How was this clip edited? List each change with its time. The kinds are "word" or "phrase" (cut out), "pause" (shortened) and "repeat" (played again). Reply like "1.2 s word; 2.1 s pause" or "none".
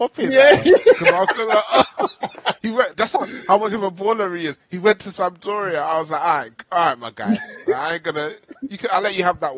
2.9 s word